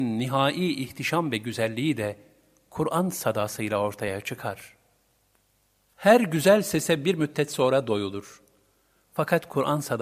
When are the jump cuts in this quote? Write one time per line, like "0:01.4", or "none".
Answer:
none

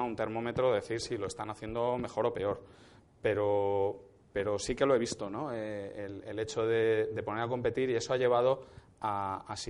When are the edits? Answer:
none

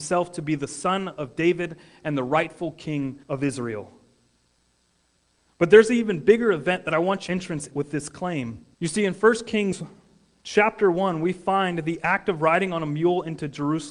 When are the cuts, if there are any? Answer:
0:03.2
0:07.3
0:07.7
0:08.7

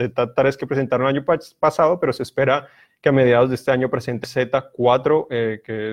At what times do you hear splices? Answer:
0:04.2

